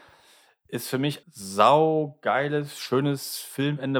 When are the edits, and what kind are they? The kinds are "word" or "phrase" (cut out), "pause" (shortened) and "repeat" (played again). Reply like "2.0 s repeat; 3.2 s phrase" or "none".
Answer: 1.2 s word